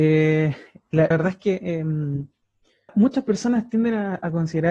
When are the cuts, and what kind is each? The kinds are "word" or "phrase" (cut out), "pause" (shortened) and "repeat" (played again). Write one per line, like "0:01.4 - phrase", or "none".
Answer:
0:01.1 - word
0:02.9 - word